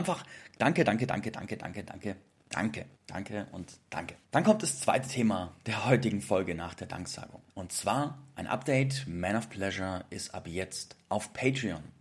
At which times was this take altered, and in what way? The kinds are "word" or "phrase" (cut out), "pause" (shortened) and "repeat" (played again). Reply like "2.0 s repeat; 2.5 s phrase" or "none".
2.9 s pause; 4.2 s pause; 7.5 s pause